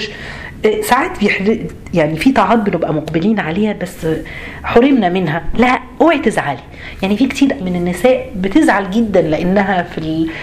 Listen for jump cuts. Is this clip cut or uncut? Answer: cut